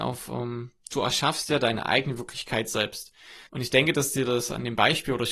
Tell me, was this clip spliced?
yes; 1 cut; at 3.5 s

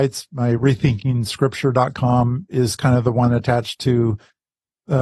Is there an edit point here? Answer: no; 0 cuts

